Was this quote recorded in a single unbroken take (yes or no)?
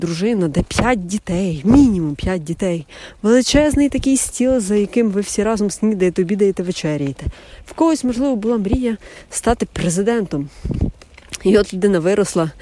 yes